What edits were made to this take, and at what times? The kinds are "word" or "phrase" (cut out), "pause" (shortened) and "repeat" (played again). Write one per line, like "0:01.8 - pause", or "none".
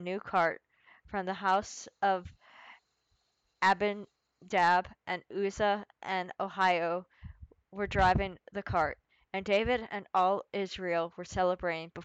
none